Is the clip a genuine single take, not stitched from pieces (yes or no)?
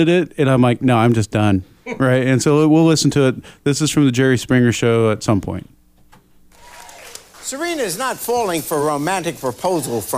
yes